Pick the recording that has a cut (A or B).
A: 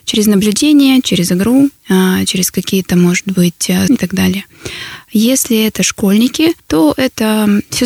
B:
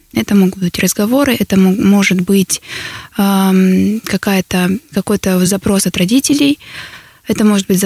A